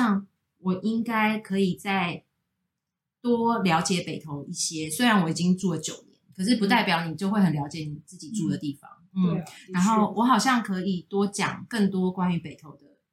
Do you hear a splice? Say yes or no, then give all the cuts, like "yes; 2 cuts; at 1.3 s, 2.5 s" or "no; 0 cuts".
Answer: no; 0 cuts